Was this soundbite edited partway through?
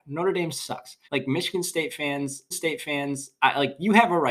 yes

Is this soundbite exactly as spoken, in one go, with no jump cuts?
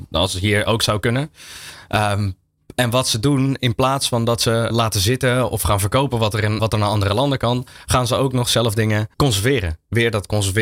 no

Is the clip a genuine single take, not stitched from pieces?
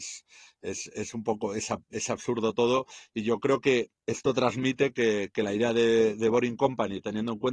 no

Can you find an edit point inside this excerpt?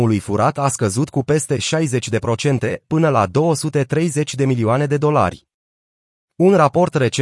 no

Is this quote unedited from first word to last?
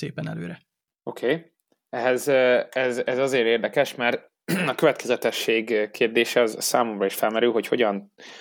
yes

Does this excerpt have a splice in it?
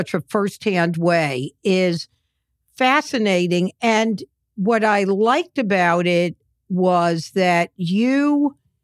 no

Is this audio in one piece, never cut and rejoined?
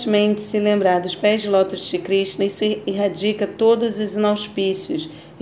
yes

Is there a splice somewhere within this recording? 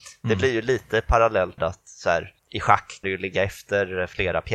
yes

